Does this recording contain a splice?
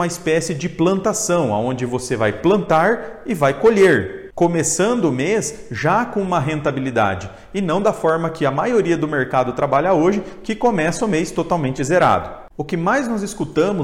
no; 0 cuts

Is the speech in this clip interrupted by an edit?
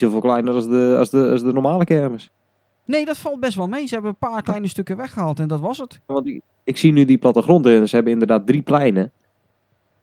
no; 0 cuts

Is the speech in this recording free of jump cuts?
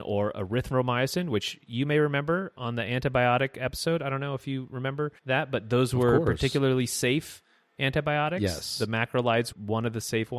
no; 2 cuts; at 5.2 s, 9.5 s

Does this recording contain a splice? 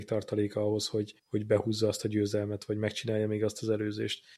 no; 0 cuts

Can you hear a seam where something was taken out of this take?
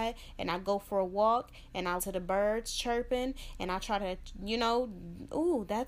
yes; 1 cut; at 2.0 s

